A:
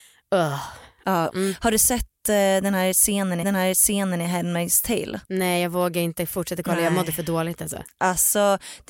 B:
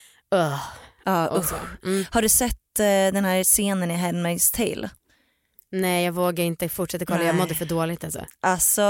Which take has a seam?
A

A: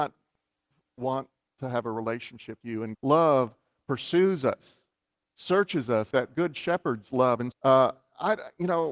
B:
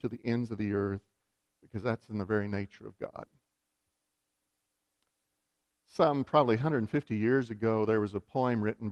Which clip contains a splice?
A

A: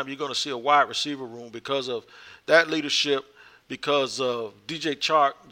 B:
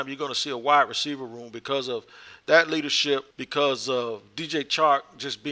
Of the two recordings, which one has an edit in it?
B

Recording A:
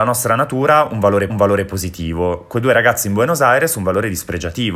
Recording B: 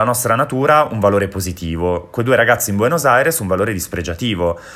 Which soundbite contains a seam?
A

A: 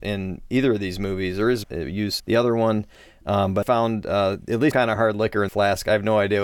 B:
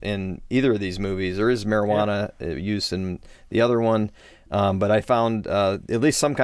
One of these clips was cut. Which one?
A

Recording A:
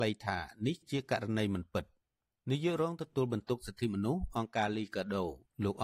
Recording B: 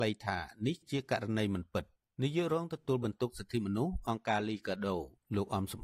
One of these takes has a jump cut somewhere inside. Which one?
B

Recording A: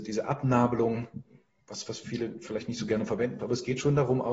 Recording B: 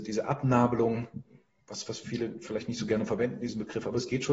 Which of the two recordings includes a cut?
A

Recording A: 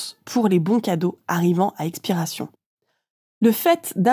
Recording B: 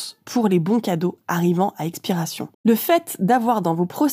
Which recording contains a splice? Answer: B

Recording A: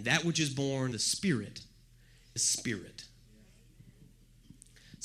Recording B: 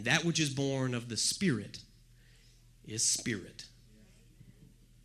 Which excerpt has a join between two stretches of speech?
A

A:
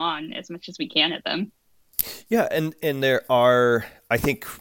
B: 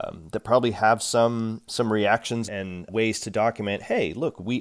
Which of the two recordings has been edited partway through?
B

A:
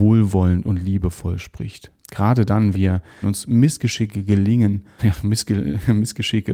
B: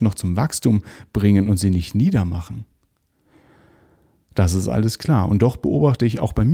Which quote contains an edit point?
A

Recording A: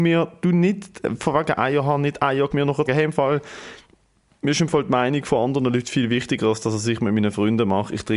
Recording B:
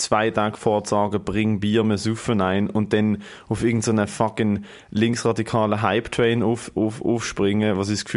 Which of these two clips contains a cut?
A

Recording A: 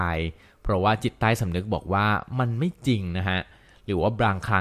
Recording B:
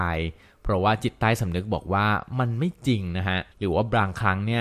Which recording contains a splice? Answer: B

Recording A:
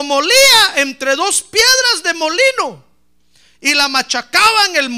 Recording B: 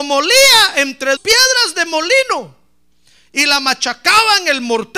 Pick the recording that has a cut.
B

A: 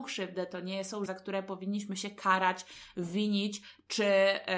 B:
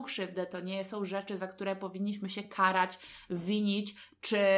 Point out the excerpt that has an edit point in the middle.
A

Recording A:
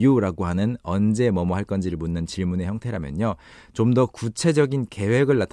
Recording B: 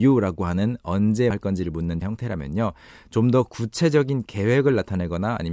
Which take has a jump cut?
B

